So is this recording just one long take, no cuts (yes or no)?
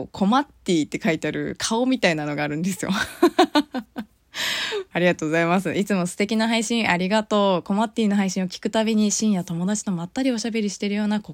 yes